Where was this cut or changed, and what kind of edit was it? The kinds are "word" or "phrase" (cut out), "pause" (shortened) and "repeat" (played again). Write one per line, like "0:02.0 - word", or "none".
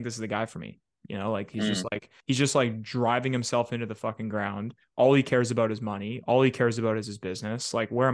0:02.2 - pause